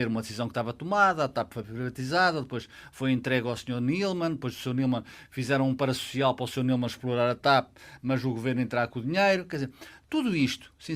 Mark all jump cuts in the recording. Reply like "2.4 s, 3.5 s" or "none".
none